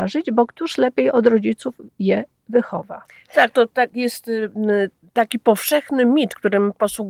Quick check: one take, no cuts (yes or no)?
yes